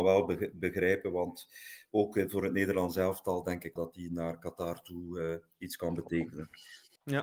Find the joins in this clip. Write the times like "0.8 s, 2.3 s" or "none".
3.8 s